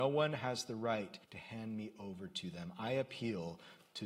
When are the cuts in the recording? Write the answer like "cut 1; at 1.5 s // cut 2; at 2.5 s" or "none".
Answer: cut 1; at 1.2 s